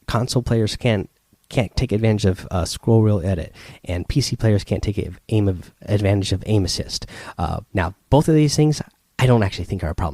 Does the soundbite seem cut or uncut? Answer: cut